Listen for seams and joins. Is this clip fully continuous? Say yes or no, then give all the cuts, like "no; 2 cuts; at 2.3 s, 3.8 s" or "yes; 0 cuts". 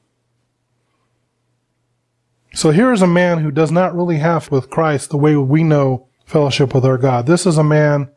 no; 2 cuts; at 4.5 s, 6.2 s